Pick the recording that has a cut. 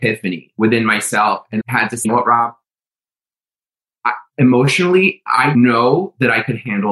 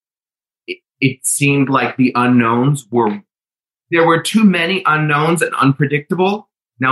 first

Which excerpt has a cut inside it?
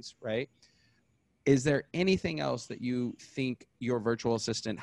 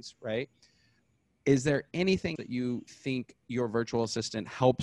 second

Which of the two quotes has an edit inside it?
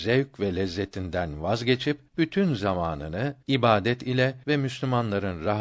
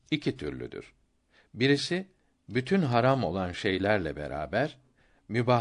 first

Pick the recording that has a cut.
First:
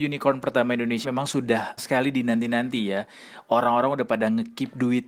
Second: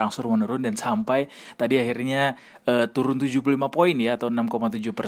first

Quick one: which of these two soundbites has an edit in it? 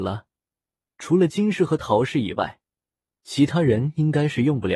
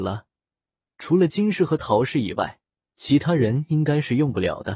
second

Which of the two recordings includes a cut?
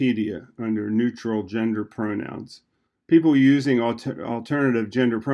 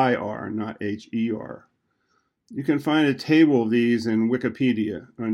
first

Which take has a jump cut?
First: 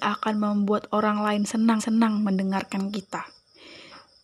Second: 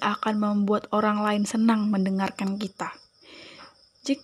first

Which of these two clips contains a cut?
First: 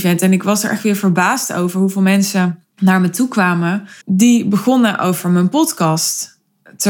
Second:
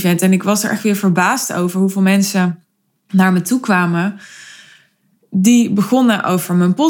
first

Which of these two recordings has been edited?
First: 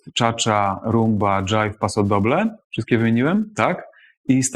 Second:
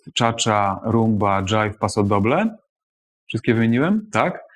first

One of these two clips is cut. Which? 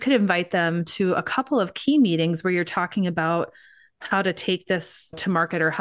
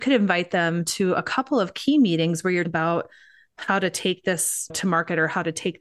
second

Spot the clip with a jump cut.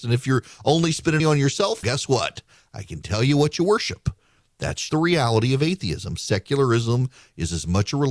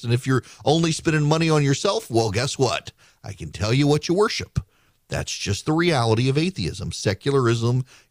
first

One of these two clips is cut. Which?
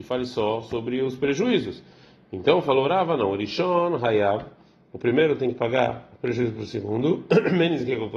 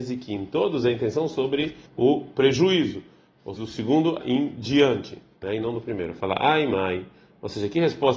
second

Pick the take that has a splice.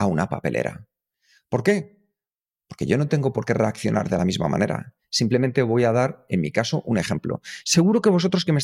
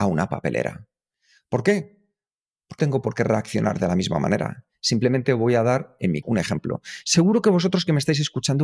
second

